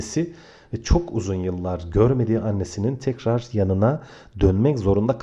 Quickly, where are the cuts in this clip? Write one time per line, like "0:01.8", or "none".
none